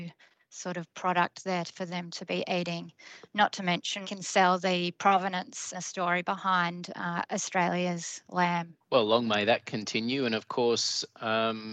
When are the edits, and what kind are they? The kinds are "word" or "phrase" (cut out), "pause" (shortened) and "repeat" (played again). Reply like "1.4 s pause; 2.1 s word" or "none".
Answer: 4.0 s phrase; 5.7 s word; 8.8 s pause